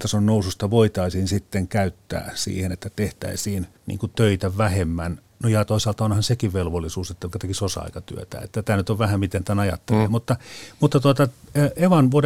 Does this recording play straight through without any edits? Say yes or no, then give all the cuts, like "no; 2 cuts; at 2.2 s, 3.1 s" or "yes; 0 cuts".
no; 3 cuts; at 3.8 s, 5.3 s, 7.3 s